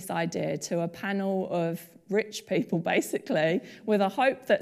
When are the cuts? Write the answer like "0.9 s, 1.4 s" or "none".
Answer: none